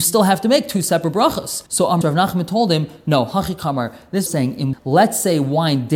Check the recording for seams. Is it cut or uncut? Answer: cut